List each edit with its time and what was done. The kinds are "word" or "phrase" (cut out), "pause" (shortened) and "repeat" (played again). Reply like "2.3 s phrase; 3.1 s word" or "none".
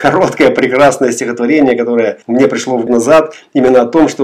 2.2 s pause; 2.9 s phrase